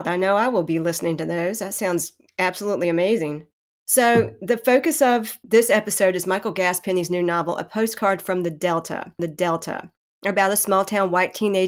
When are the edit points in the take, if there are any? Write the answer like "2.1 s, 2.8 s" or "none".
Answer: 9.2 s